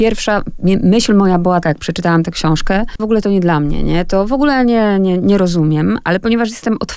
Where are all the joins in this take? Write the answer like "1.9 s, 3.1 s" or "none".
1.6 s, 3.0 s